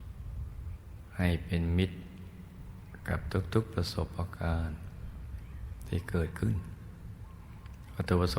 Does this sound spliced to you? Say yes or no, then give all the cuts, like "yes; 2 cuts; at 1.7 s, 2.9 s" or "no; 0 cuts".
no; 0 cuts